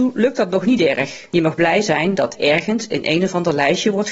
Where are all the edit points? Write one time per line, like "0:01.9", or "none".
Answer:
0:02.3